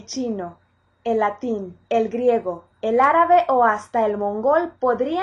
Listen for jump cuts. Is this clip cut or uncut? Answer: cut